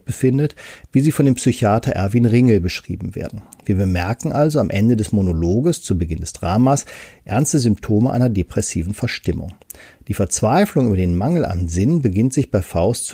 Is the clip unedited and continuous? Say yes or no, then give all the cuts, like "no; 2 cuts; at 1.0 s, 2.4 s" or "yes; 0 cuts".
yes; 0 cuts